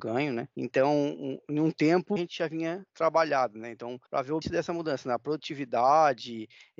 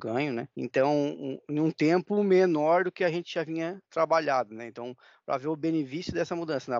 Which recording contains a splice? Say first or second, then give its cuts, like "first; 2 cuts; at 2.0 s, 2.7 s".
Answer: first; 3 cuts; at 2.2 s, 4.1 s, 4.4 s